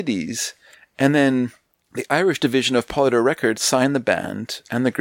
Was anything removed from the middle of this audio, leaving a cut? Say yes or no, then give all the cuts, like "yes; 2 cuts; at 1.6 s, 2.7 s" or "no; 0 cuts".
no; 0 cuts